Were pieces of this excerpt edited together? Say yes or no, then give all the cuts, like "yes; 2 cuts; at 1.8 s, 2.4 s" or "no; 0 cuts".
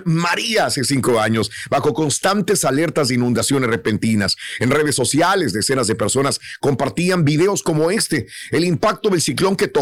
no; 0 cuts